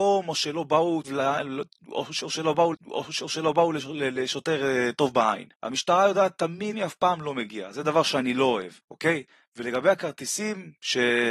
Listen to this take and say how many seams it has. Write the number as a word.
five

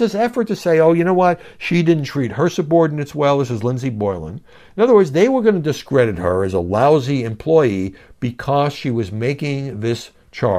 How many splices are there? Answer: zero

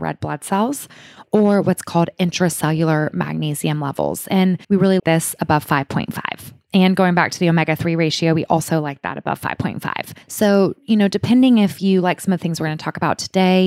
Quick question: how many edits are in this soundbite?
three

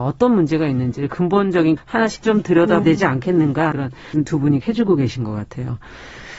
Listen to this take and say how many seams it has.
six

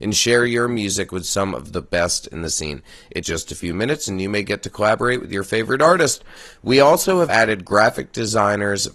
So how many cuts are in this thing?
two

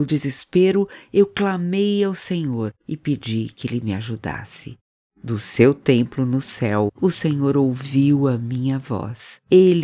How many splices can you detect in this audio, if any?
zero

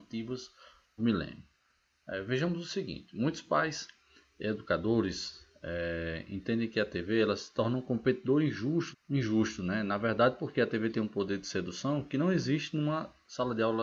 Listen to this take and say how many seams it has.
two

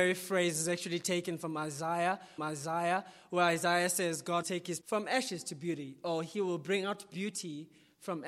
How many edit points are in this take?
three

